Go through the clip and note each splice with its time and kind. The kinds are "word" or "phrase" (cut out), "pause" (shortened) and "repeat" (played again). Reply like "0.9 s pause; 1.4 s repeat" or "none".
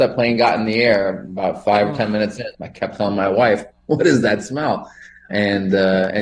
2.5 s word; 5.3 s word